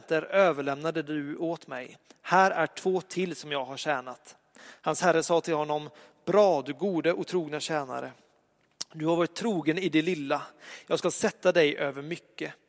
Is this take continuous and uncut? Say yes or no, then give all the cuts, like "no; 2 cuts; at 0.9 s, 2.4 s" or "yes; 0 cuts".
yes; 0 cuts